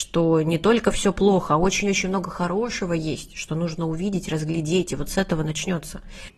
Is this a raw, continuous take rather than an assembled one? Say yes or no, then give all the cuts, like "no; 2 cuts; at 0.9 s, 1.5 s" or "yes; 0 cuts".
yes; 0 cuts